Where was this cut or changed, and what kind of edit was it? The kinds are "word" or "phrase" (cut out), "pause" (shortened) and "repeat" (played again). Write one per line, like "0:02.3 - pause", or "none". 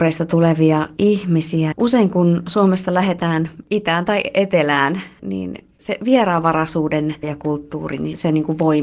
0:01.7 - word
0:07.2 - word

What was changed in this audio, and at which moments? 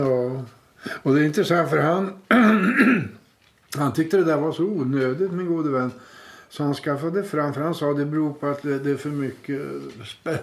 none

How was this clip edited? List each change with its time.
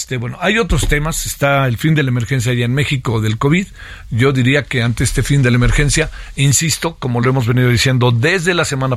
none

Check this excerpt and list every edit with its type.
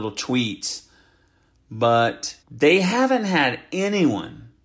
0:02.4 - pause

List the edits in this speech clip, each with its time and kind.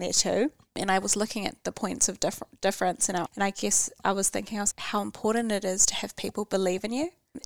0:03.3 - word
0:04.7 - word

